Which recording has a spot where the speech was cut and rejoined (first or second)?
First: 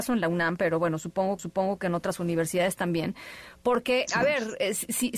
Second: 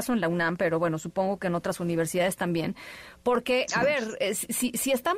first